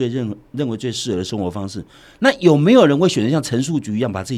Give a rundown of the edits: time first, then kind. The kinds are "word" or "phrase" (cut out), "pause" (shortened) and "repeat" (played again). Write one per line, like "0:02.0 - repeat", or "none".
none